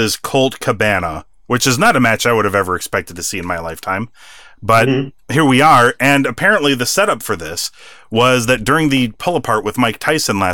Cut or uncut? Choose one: uncut